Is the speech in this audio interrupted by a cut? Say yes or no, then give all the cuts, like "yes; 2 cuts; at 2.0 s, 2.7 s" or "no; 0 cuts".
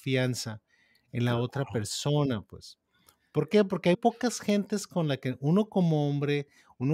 yes; 1 cut; at 3.9 s